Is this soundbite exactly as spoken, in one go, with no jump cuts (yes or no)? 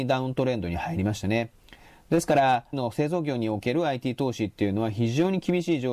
no